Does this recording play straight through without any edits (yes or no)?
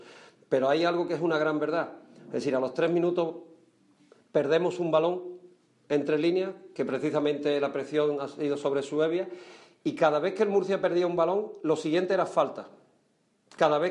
yes